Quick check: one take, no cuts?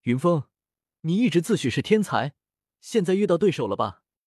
yes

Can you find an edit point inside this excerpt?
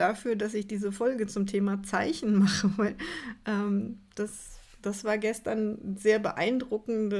no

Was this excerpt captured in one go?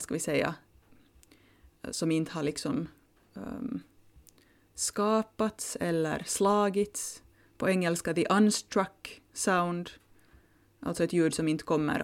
yes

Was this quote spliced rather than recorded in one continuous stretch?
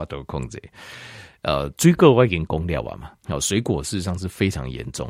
yes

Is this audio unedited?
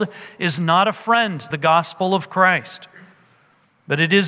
no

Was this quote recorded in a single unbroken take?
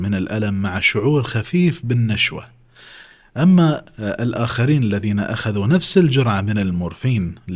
yes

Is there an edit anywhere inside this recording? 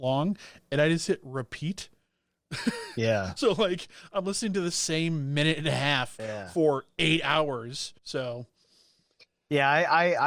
yes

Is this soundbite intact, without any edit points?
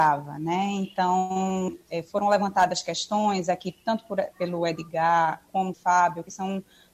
no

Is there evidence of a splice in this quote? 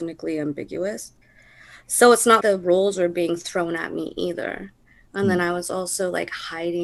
yes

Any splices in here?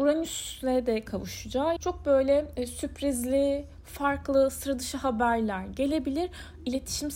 yes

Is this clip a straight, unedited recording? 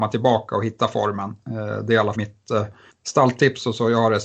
no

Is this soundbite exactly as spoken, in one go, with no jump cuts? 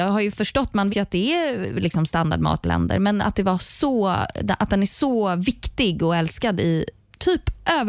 no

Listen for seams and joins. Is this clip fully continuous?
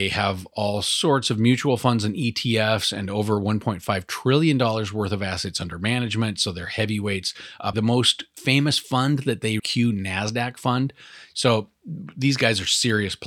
no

